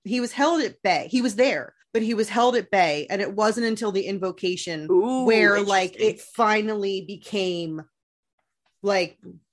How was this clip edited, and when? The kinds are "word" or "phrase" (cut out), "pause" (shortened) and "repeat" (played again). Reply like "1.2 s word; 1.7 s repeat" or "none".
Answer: 1.8 s pause